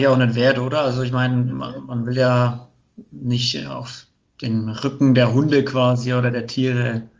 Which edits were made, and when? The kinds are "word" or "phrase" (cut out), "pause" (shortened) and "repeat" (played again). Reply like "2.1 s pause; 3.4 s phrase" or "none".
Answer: none